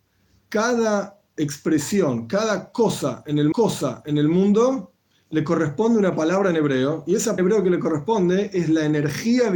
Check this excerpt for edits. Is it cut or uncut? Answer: cut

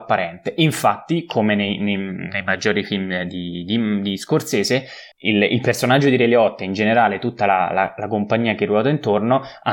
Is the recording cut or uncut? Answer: cut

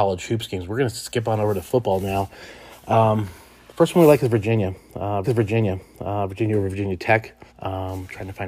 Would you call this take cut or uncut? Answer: cut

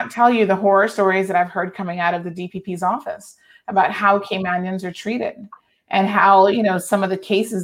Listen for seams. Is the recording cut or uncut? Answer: uncut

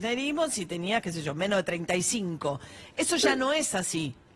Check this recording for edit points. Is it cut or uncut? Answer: uncut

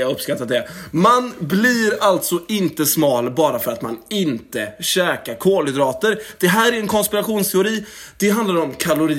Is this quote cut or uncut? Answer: uncut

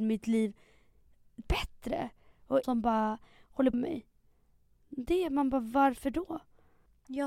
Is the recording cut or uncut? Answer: cut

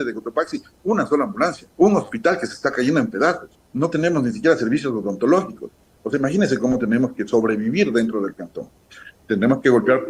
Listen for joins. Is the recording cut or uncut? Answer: cut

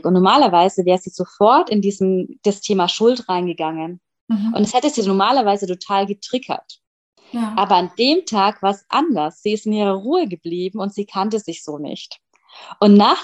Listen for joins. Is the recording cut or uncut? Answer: uncut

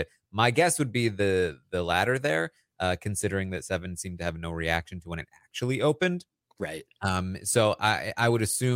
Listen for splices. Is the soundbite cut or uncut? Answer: uncut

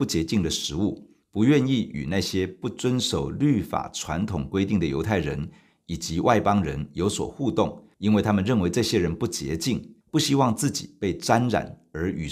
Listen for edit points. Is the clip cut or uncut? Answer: cut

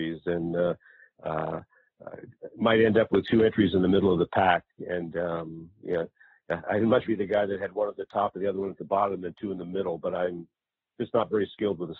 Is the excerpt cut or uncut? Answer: cut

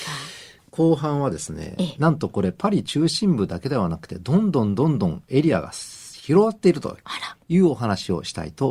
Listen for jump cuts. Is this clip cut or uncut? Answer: uncut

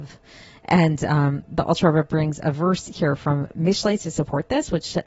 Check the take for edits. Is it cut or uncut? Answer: uncut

